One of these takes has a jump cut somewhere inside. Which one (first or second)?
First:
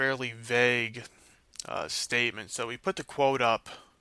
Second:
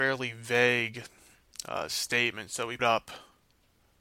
second